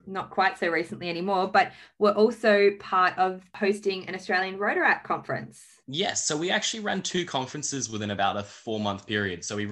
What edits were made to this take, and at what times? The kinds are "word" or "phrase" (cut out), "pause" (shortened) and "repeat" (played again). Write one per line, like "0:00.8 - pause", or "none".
0:05.8 - pause